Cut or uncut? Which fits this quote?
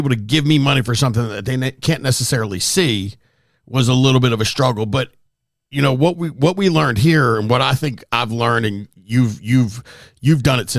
uncut